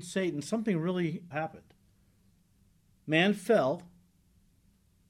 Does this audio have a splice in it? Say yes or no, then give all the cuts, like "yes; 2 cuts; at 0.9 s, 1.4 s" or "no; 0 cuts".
yes; 1 cut; at 1.3 s